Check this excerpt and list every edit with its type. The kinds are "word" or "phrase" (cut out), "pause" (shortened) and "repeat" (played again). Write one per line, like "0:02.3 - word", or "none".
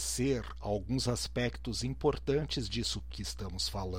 0:03.1 - word